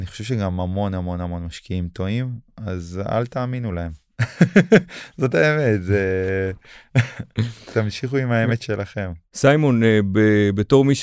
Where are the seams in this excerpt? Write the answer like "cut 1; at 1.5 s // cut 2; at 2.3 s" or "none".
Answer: cut 1; at 2.5 s